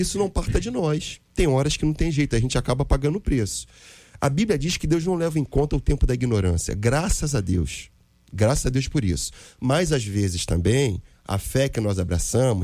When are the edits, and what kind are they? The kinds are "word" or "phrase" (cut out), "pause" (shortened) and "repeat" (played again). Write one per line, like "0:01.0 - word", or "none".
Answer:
0:01.3 - pause